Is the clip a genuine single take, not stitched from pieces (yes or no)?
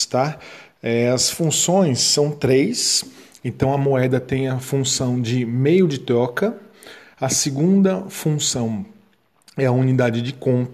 yes